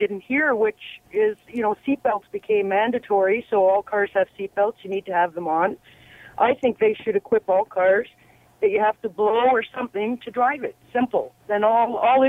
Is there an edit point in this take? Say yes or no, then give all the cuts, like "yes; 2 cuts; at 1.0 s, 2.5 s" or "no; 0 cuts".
no; 0 cuts